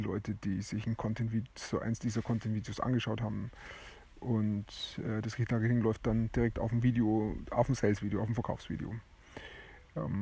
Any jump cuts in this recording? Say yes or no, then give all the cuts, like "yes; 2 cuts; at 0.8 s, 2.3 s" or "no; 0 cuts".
no; 0 cuts